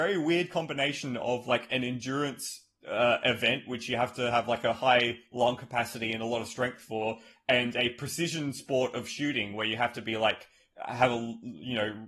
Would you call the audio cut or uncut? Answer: uncut